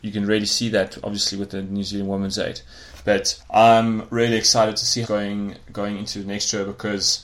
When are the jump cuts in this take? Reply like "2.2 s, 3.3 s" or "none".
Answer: 3.4 s, 5.0 s